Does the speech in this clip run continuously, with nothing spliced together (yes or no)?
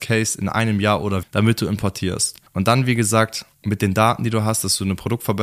no